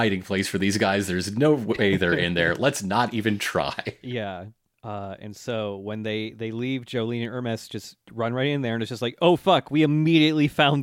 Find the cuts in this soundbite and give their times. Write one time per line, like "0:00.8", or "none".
0:08.0